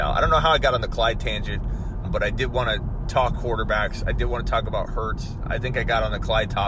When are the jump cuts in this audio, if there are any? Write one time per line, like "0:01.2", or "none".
0:02.0
0:03.3